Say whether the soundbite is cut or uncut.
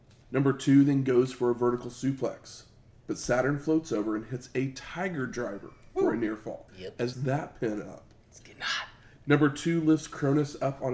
cut